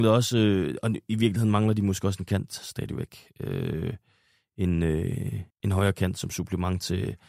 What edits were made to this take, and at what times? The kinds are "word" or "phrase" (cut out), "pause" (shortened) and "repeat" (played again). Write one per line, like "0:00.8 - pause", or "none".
0:05.5 - pause